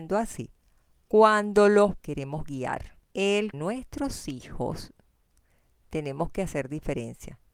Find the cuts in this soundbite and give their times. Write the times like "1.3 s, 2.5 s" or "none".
2.0 s, 3.5 s